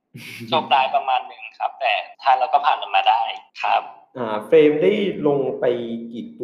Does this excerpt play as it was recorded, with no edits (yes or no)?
no